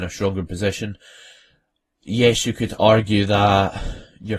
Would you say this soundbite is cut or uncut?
uncut